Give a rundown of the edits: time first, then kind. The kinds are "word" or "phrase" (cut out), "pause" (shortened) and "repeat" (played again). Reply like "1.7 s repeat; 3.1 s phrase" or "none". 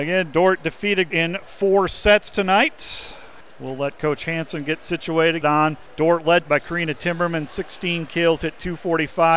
1.1 s word; 3.4 s pause; 5.4 s phrase; 5.9 s pause; 6.5 s word